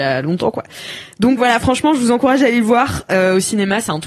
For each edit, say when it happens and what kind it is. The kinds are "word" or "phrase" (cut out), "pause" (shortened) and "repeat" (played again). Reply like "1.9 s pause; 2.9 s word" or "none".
1.4 s word